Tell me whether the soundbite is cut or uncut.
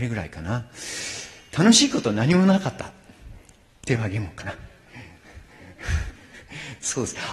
uncut